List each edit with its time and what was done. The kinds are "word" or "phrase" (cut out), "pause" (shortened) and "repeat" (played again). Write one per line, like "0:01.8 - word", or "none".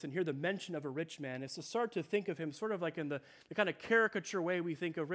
none